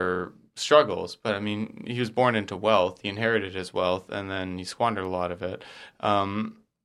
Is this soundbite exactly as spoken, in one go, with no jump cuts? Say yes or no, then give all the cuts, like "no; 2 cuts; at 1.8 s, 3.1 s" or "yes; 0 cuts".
yes; 0 cuts